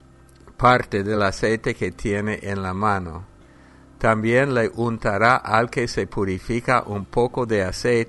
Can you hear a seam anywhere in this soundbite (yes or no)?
no